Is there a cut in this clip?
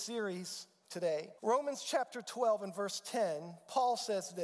yes; 1 cut; at 1.4 s

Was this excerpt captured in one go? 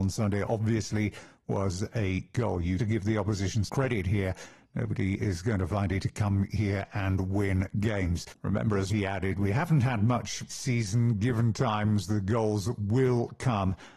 no; 5 cuts; at 2.8 s, 3.7 s, 6.0 s, 8.9 s, 10.5 s

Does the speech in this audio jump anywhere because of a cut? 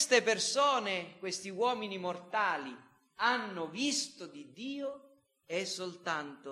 no; 0 cuts

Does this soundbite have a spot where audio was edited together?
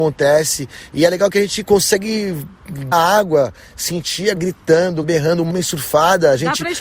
yes; 4 cuts; at 2.9 s, 4.4 s, 5.0 s, 5.5 s

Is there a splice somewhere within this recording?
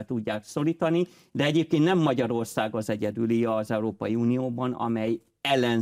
no; 0 cuts

